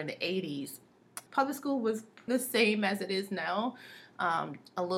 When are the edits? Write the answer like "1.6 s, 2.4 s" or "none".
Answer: 1.3 s, 2.3 s